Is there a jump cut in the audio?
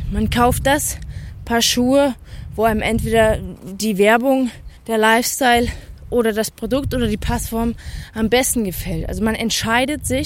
yes; 1 cut; at 4.8 s

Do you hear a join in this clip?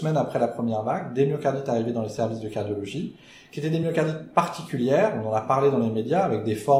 no; 0 cuts

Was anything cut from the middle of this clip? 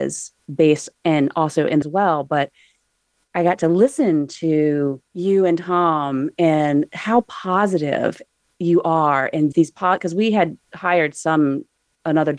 yes; 3 cuts; at 1.8 s, 5.1 s, 9.5 s

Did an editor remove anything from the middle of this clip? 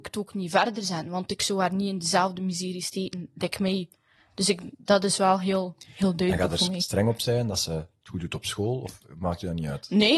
no; 0 cuts

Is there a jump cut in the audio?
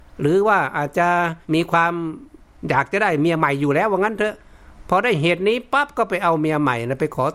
yes; 1 cut; at 1.4 s

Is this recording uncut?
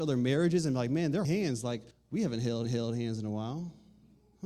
no; 3 cuts; at 1.2 s, 1.9 s, 2.6 s

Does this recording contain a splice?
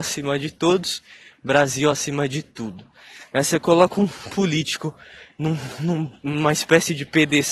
no; 0 cuts

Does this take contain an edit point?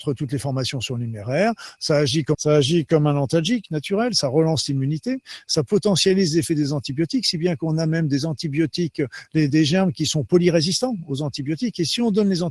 yes; 2 cuts; at 2.3 s, 9.5 s

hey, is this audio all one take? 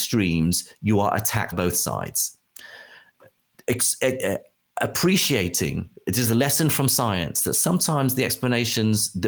no; 1 cut; at 1.5 s

